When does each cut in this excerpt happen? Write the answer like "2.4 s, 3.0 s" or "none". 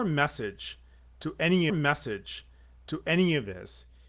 1.7 s